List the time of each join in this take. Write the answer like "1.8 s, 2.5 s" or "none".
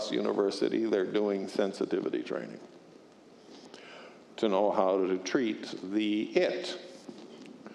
none